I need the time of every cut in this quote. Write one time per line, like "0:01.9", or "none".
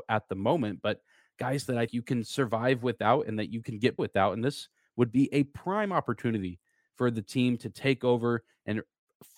0:01.9
0:04.0